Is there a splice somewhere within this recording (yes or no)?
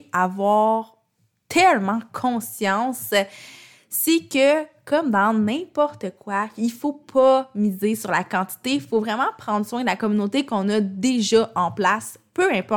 no